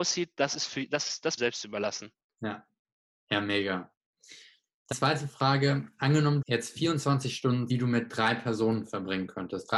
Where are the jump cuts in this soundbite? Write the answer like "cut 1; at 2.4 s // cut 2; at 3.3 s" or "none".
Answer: cut 1; at 1.4 s // cut 2; at 4.9 s // cut 3; at 6.4 s // cut 4; at 7.7 s